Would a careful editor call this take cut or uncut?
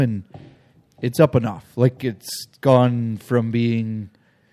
uncut